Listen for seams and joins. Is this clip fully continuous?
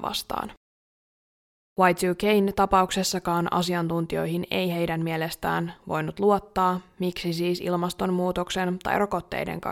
yes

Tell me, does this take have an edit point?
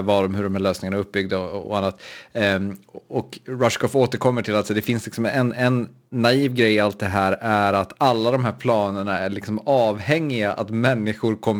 no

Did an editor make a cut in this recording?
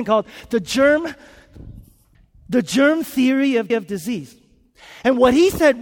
yes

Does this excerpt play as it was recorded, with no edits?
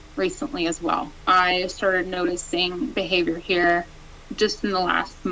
no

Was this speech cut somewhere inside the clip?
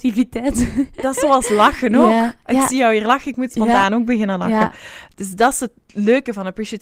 no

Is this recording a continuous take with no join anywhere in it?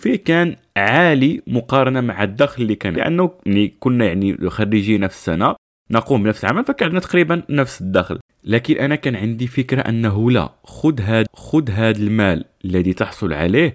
no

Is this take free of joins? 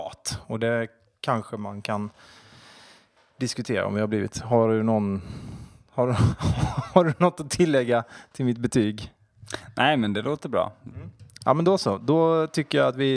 yes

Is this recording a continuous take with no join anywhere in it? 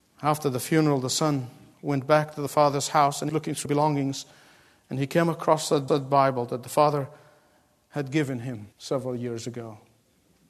no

